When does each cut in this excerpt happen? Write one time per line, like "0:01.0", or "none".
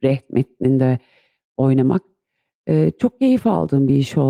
none